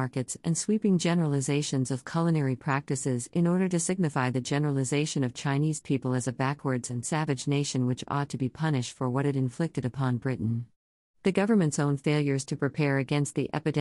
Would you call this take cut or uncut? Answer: uncut